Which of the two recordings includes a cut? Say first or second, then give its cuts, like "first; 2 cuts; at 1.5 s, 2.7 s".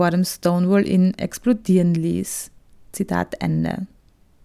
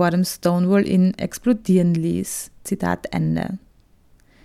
second; 1 cut; at 2.6 s